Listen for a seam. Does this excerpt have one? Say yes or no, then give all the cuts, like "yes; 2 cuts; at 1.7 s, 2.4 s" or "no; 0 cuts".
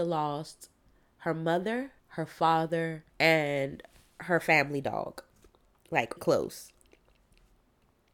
yes; 3 cuts; at 2.0 s, 3.1 s, 6.2 s